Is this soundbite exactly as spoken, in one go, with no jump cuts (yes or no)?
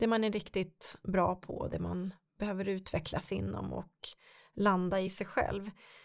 yes